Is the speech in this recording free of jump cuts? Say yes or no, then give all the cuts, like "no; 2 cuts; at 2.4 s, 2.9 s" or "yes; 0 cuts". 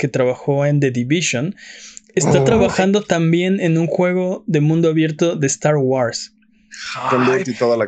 yes; 0 cuts